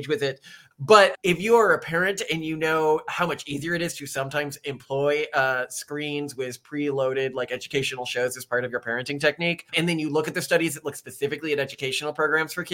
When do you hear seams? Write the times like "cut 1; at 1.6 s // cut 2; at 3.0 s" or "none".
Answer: cut 1; at 9.7 s